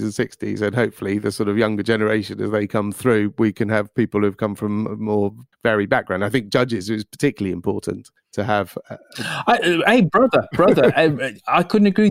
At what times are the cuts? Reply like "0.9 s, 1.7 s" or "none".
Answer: 5.5 s, 8.2 s